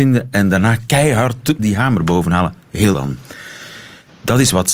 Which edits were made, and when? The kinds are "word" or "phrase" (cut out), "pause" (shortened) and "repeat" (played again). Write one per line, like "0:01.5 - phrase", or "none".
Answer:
0:01.6 - word
0:02.9 - word